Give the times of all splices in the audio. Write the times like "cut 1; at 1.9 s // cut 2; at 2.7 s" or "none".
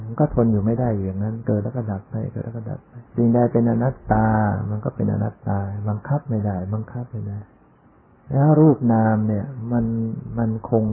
cut 1; at 3.1 s // cut 2; at 7.9 s